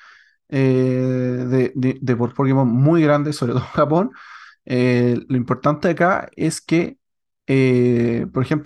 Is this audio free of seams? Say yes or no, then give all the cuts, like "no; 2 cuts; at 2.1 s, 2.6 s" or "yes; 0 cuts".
yes; 0 cuts